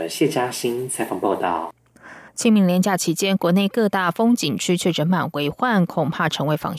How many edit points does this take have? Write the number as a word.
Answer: one